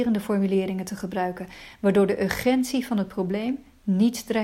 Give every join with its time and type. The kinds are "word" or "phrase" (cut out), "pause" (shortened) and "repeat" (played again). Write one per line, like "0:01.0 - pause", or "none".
none